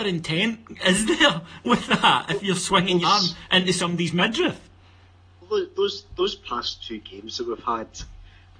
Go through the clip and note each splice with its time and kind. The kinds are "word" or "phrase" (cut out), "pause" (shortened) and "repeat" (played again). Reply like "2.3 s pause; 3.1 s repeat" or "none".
3.0 s word